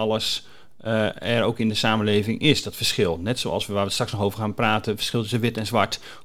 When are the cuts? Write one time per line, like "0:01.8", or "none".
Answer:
none